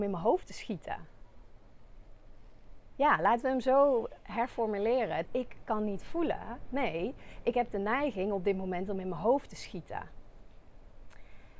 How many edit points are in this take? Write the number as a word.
one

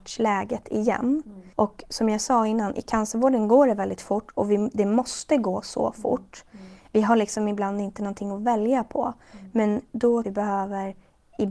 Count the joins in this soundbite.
two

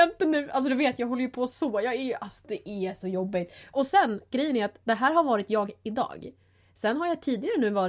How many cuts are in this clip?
zero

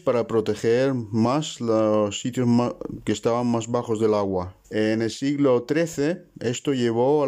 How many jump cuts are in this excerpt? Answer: one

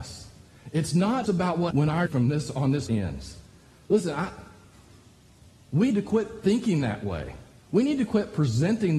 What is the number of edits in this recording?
five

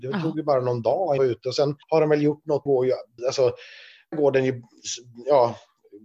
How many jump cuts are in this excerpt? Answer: five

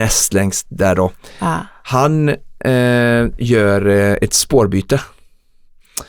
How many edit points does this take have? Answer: zero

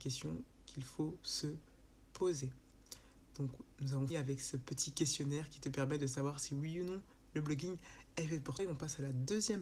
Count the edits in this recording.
two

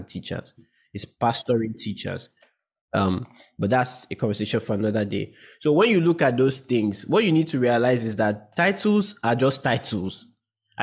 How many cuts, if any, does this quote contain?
zero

